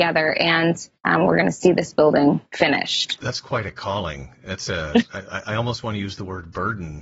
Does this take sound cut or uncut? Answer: cut